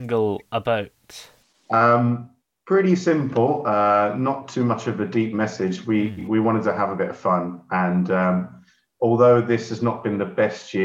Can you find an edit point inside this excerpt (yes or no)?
no